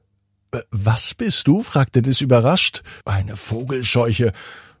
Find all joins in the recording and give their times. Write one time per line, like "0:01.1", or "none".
0:03.0